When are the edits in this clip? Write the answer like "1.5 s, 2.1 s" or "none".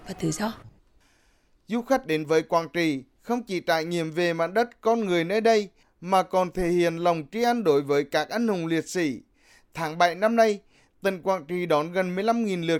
none